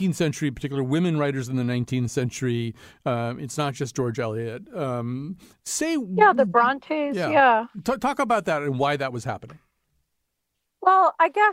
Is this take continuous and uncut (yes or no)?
yes